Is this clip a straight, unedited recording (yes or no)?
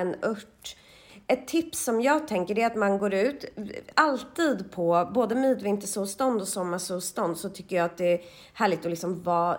yes